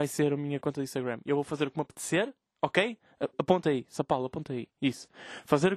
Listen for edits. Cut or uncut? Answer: uncut